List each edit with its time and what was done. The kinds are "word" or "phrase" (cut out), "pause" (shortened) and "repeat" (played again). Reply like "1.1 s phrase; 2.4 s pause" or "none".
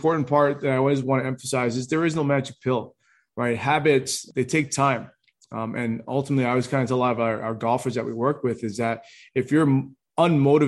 none

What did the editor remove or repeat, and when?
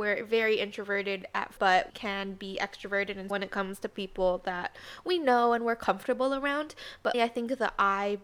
1.6 s word; 1.9 s word; 3.3 s word; 7.1 s word

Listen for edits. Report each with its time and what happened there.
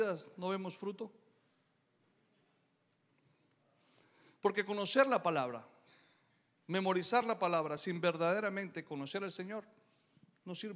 none

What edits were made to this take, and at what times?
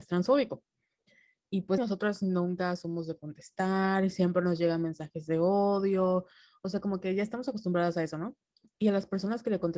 1.8 s phrase

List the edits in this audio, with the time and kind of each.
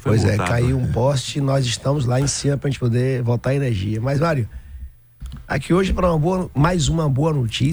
none

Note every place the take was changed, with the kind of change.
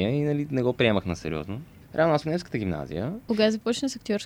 2.2 s word

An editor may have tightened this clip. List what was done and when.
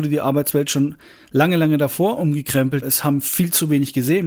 2.8 s word

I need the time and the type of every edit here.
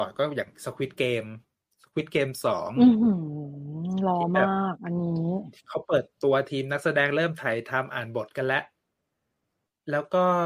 none

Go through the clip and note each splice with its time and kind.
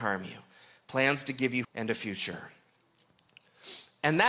1.6 s word

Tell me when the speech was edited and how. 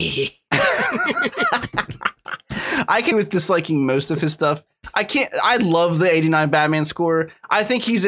3.1 s word

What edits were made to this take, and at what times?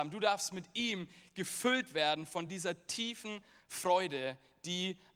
none

